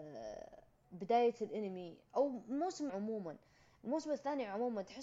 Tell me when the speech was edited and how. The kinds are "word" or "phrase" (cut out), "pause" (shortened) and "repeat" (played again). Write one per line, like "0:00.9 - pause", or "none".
0:02.9 - word

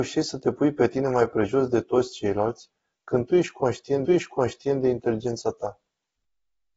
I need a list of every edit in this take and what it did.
0:04.0 - repeat

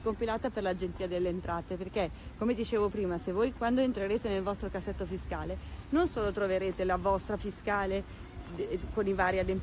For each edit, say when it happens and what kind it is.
0:07.4 - word

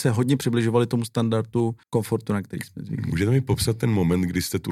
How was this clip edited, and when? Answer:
0:01.8 - pause

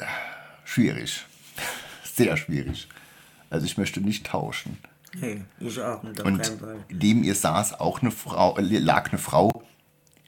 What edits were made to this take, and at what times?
none

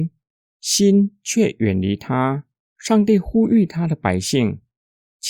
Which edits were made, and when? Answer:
0:02.6 - pause

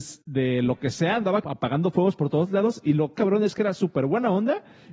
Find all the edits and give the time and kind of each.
0:01.4 - phrase
0:03.1 - word

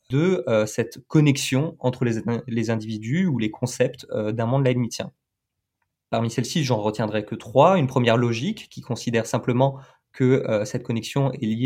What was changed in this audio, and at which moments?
none

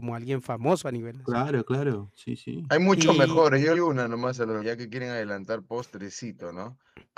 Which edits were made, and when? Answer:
0:03.7 - phrase
0:04.6 - word

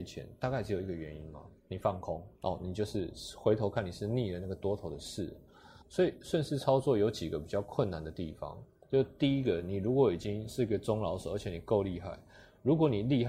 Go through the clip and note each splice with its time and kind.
0:01.6 - pause
0:02.4 - pause
0:05.8 - pause

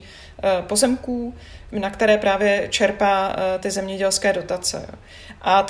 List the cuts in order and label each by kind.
0:01.7 - word

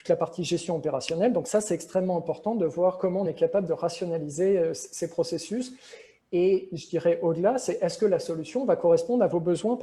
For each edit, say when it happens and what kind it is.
none

